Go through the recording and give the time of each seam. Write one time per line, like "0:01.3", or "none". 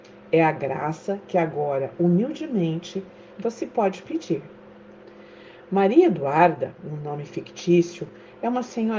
none